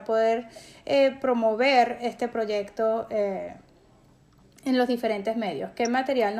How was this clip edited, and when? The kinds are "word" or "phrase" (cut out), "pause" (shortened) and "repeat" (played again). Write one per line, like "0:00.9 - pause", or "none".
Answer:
none

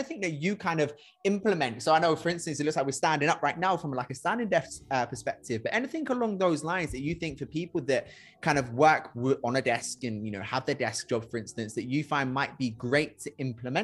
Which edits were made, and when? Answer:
none

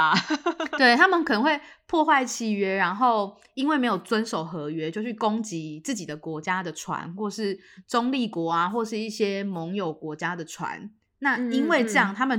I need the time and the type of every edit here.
none

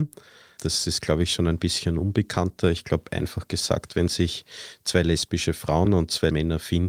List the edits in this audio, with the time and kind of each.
none

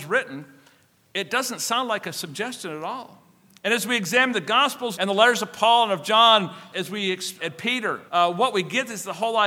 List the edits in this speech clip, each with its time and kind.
0:04.9 - word
0:06.7 - word
0:07.4 - word
0:08.1 - pause

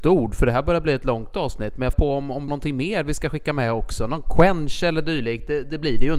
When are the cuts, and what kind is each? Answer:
0:01.9 - word
0:02.5 - phrase

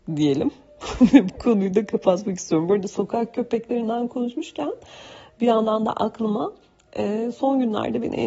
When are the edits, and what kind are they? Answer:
none

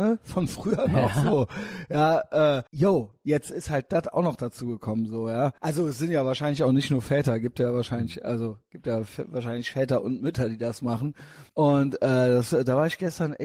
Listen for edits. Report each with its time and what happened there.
0:02.7 - pause
0:05.6 - pause
0:11.5 - pause

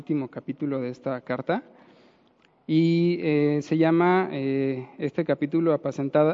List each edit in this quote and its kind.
none

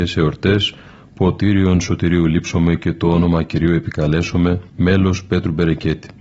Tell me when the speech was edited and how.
0:04.7 - pause

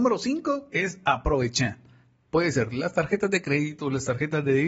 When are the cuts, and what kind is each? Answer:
none

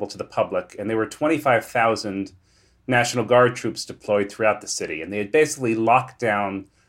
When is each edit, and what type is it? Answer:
none

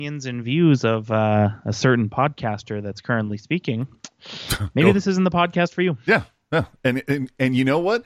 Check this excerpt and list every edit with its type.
none

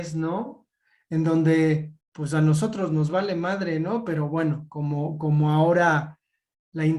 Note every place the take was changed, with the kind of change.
0:02.0 - pause

